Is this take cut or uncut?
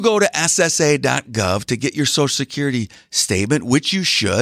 uncut